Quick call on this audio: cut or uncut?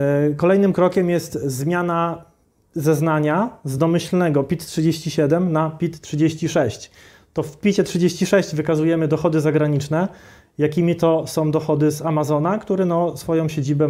uncut